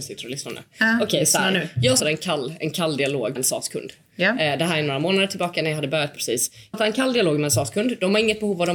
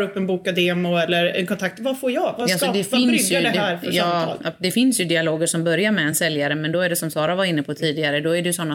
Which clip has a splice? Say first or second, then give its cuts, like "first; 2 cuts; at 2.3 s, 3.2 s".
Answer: first; 4 cuts; at 2.0 s, 3.4 s, 6.2 s, 6.7 s